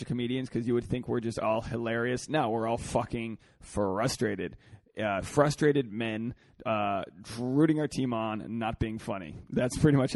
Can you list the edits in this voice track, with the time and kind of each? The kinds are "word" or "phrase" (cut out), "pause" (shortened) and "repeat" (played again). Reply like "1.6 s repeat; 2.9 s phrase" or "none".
none

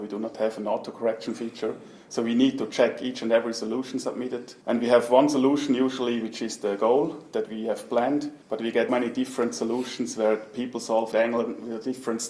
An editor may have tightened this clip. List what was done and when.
4.6 s pause; 8.4 s pause; 8.9 s word; 11.1 s phrase

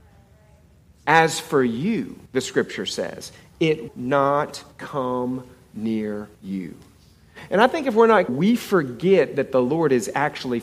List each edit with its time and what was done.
2.3 s pause; 3.9 s word; 4.7 s pause; 6.3 s pause; 8.3 s word

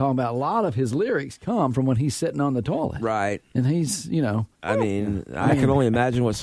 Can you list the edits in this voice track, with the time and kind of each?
4.5 s pause

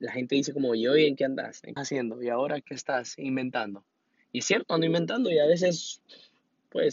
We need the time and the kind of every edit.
1.8 s phrase; 2.6 s word

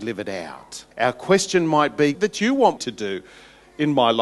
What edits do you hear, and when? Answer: 0.9 s pause; 2.1 s phrase; 2.8 s word

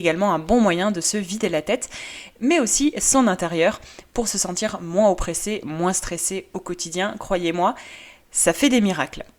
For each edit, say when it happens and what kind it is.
none

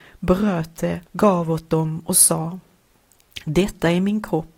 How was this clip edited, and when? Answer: 1.1 s pause

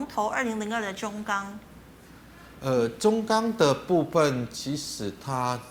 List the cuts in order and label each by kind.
none

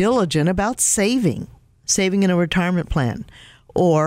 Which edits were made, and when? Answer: none

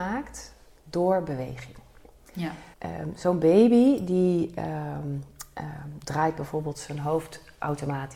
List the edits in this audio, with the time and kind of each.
2.7 s pause

